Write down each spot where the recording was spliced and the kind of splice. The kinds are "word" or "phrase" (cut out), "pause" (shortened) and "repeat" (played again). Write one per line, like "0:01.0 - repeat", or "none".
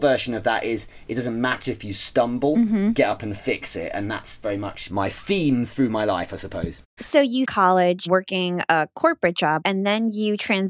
0:06.9 - pause
0:07.4 - phrase